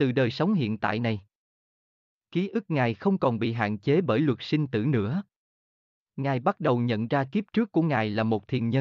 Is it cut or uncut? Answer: uncut